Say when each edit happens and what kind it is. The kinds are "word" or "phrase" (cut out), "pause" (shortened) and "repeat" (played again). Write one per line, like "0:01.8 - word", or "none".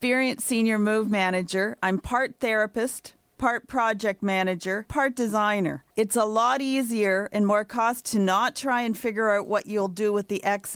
0:04.9 - word
0:05.9 - pause
0:08.0 - word